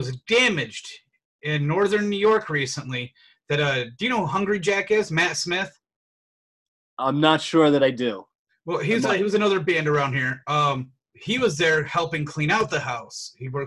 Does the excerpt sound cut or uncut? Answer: uncut